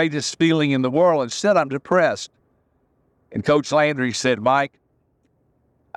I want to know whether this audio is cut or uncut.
uncut